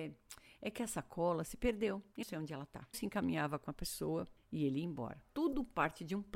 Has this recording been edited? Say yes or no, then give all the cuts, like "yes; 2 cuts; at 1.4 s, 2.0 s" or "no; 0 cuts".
yes; 4 cuts; at 2.2 s, 2.9 s, 4.4 s, 5.3 s